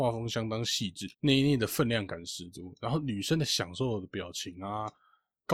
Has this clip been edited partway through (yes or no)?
yes